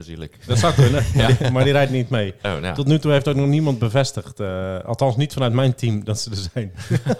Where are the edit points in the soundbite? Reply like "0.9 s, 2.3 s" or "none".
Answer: none

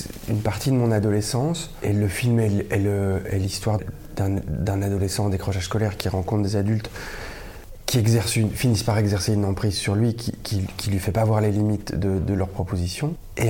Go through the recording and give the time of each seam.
3.8 s

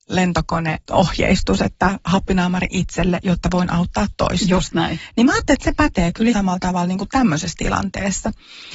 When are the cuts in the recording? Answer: 2.7 s, 6.3 s

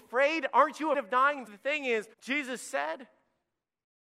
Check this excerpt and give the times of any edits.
0.9 s, 1.5 s, 2.1 s

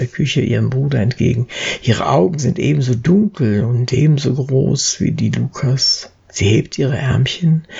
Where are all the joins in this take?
6.2 s

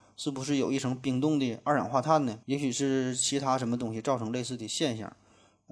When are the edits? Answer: 2.4 s

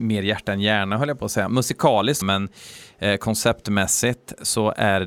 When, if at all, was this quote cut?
2.2 s

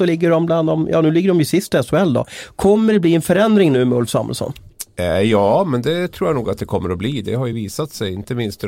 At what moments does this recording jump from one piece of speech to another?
none

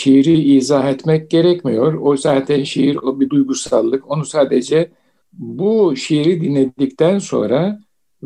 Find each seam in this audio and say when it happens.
5.2 s

